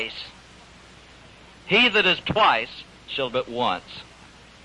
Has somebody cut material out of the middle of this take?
yes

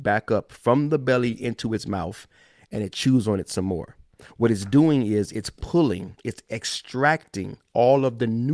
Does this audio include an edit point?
no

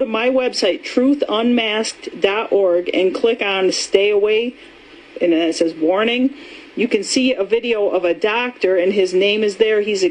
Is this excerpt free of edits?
yes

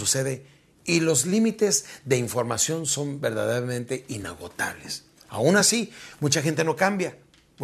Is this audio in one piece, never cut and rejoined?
yes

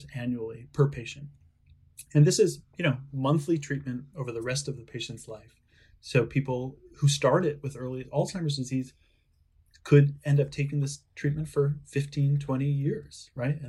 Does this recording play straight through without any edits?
yes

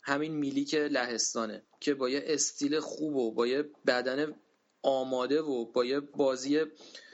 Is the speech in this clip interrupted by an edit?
no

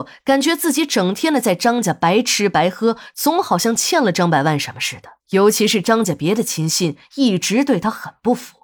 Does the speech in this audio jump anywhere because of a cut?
yes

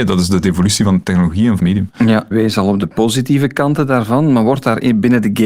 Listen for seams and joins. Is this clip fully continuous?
no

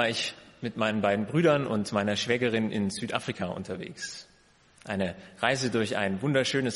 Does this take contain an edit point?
no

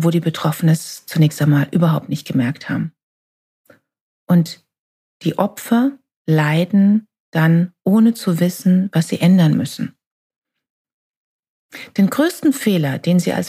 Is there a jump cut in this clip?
no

